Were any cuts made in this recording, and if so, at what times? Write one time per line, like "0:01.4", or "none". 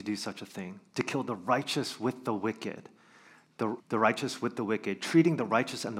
0:03.8